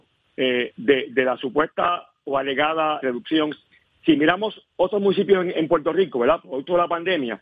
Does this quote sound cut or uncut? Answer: cut